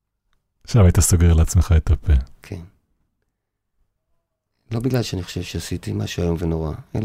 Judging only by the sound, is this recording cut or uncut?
uncut